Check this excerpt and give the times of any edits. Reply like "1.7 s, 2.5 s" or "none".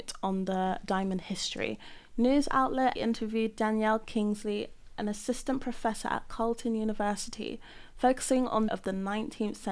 3.0 s, 8.7 s